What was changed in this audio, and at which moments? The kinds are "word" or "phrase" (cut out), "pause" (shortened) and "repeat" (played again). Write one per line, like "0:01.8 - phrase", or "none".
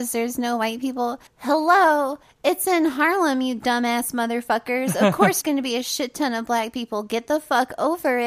0:01.3 - pause
0:05.4 - word